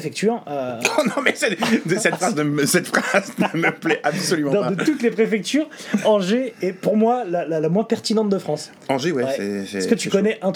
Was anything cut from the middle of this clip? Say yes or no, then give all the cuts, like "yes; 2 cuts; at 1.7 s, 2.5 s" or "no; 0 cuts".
no; 0 cuts